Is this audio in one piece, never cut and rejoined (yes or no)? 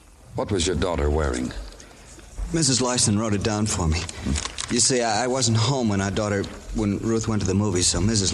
yes